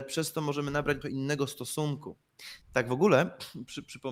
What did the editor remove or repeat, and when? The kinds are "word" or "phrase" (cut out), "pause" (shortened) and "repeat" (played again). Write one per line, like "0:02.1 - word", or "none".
0:01.0 - phrase
0:02.6 - pause